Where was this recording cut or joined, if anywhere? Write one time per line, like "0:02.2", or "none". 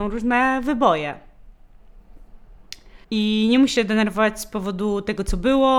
0:03.0
0:03.8

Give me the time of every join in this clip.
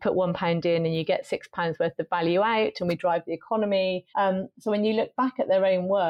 0:04.1

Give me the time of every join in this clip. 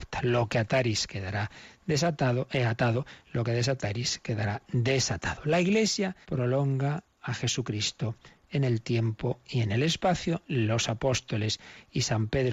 0:06.2

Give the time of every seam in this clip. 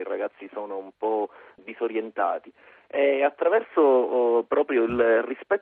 none

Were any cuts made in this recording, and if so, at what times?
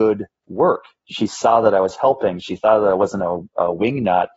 none

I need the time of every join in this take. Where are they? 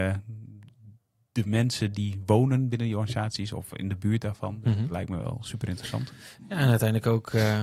none

